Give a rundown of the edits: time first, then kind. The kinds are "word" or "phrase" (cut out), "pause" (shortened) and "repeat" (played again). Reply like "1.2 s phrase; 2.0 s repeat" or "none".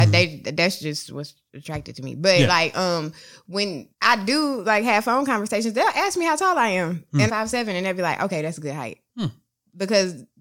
3.9 s pause; 7.3 s phrase; 9.1 s pause